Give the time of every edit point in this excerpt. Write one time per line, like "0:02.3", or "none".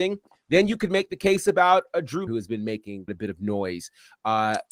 0:02.3
0:03.1